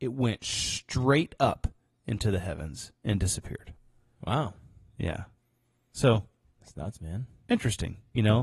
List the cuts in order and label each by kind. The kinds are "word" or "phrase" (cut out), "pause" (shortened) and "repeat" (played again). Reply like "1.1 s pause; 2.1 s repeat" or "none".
none